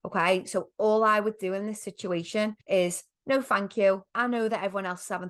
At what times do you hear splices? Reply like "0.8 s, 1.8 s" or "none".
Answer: 2.6 s, 4.1 s